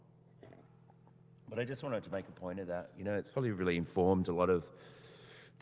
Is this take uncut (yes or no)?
yes